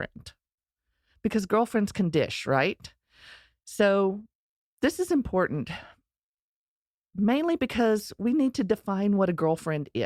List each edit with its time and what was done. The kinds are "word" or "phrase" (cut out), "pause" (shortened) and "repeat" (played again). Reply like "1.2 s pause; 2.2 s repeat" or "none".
none

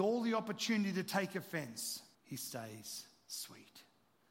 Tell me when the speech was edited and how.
2.1 s pause

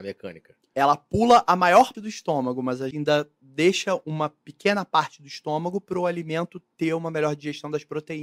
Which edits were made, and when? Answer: 1.9 s word; 2.9 s word

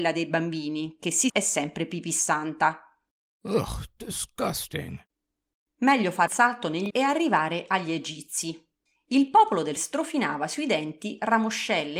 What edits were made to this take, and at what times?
1.3 s word; 6.3 s word; 6.9 s word; 9.8 s word

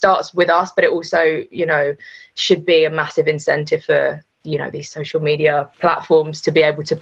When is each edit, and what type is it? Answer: 4.3 s pause; 5.7 s pause

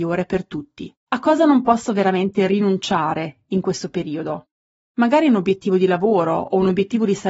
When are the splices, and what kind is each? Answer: 1.0 s pause

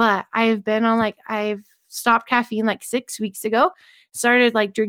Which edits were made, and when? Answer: none

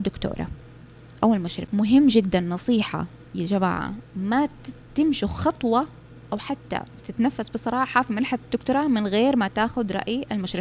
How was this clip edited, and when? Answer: 7.0 s word

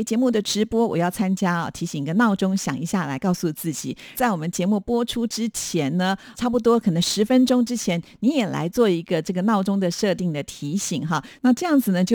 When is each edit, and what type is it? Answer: 4.1 s phrase; 6.3 s word

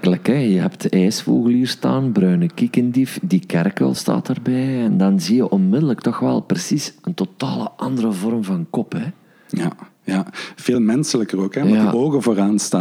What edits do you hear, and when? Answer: none

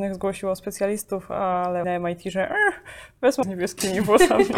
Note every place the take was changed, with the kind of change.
1.8 s word; 3.4 s word

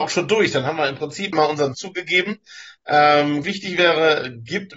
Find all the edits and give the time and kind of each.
1.3 s word; 1.7 s word; 3.4 s word

